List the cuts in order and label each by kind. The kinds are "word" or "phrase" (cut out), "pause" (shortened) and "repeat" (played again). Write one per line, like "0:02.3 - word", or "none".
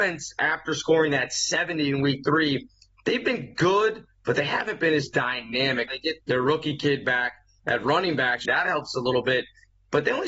0:05.9 - word
0:06.2 - word
0:08.4 - word